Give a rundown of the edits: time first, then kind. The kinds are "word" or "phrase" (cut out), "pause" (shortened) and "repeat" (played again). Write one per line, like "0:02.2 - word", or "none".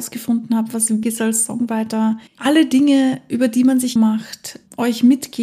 0:01.0 - word
0:02.3 - pause
0:04.0 - word